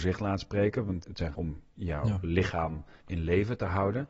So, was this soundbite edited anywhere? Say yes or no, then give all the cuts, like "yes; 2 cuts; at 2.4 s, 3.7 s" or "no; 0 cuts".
yes; 2 cuts; at 1.0 s, 1.3 s